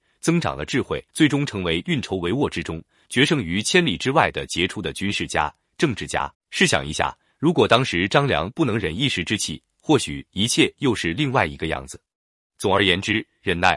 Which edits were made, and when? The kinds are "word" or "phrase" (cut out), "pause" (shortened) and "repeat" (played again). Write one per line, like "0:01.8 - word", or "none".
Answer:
0:01.1 - pause
0:06.3 - pause